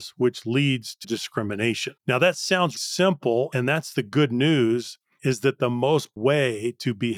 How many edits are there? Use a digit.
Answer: 5